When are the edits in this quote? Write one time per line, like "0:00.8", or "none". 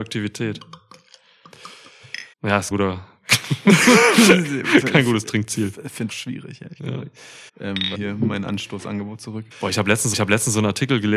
0:02.3
0:02.7
0:06.1
0:07.5
0:07.9
0:09.5
0:10.1